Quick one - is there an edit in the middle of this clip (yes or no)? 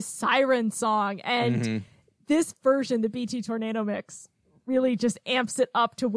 no